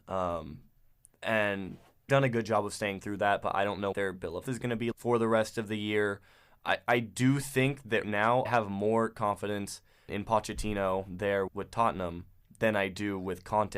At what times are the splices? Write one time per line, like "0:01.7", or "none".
0:02.1
0:03.0
0:03.9
0:04.4
0:04.9
0:08.0
0:08.5
0:10.1
0:11.5